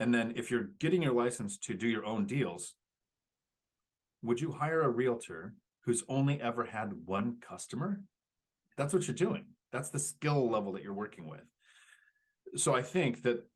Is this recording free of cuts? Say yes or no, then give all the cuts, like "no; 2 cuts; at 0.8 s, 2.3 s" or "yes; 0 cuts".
yes; 0 cuts